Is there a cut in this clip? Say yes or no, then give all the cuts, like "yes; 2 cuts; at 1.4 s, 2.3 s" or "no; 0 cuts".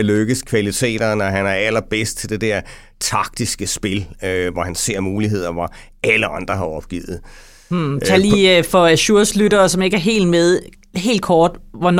no; 0 cuts